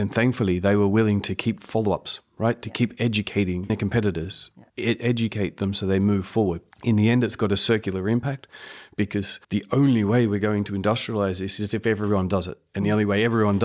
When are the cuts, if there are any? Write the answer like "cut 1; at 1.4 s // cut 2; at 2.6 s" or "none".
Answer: cut 1; at 1.6 s // cut 2; at 3.7 s // cut 3; at 4.7 s // cut 4; at 6.7 s // cut 5; at 9.4 s